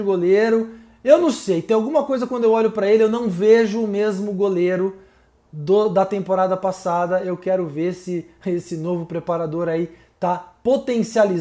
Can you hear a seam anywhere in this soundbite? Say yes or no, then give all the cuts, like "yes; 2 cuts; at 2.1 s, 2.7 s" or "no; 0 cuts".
no; 0 cuts